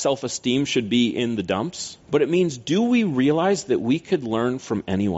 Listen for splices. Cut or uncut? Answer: cut